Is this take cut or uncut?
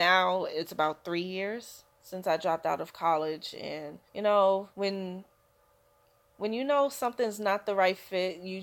cut